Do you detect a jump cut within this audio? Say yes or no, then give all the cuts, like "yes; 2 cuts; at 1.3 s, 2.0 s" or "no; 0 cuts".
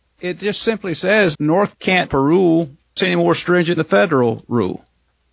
yes; 5 cuts; at 1.3 s, 1.7 s, 2.1 s, 3.0 s, 3.8 s